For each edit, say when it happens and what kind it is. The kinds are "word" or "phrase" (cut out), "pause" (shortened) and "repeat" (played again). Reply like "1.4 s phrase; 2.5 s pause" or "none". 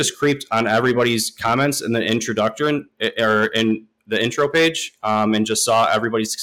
none